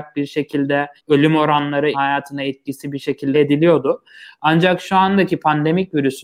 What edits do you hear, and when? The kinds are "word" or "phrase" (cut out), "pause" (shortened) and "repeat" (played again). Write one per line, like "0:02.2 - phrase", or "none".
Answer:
0:01.0 - pause
0:01.9 - word
0:03.3 - word